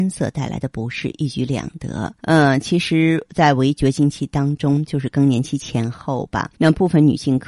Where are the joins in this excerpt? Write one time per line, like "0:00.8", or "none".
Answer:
0:02.2
0:06.5